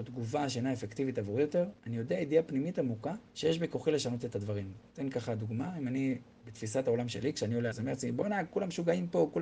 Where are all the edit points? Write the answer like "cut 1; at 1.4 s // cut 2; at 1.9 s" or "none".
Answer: cut 1; at 1.8 s // cut 2; at 3.3 s // cut 3; at 7.7 s